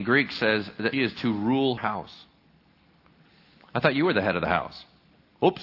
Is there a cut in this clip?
yes; 2 cuts; at 0.9 s, 1.8 s

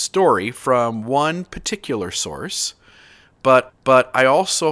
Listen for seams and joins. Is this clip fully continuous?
no; 1 cut; at 3.7 s

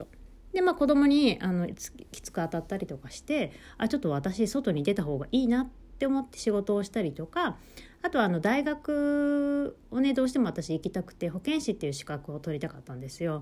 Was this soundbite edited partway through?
no; 0 cuts

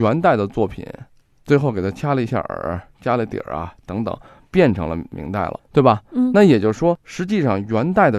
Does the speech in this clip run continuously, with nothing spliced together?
yes; 0 cuts

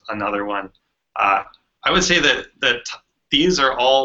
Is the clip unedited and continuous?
yes; 0 cuts

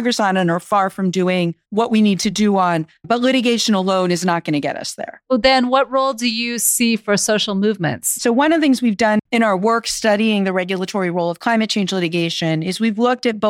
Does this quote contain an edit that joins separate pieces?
yes; 1 cut; at 1.6 s

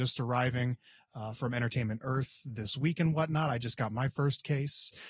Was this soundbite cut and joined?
no; 0 cuts

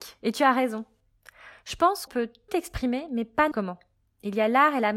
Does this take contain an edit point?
yes; 3 cuts; at 2.1 s, 2.5 s, 3.5 s

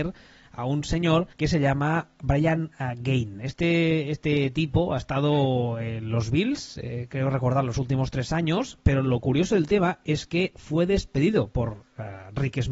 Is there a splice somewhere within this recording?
yes; 1 cut; at 1.3 s

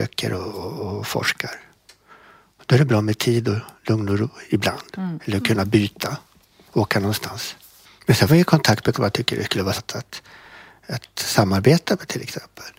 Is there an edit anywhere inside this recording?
yes; 3 cuts; at 8.3 s, 8.9 s, 9.7 s

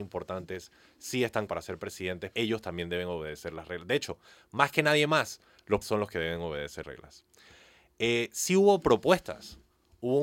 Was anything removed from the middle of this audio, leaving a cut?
yes; 4 cuts; at 1.5 s, 2.3 s, 5.8 s, 6.8 s

